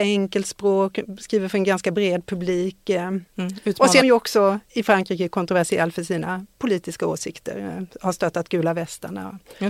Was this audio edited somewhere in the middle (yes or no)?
yes